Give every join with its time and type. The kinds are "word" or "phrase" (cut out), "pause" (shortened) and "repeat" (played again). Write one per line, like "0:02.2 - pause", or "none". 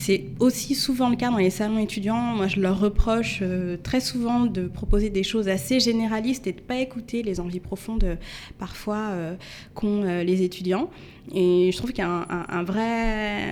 none